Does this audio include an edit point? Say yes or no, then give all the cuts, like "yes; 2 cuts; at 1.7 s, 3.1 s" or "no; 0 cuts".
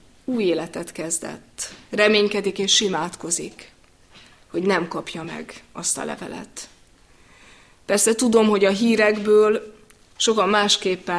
no; 0 cuts